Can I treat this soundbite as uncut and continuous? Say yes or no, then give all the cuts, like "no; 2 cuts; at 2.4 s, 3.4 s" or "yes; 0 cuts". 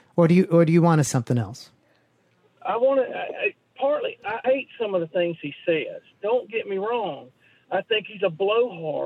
no; 3 cuts; at 1.1 s, 3.7 s, 4.4 s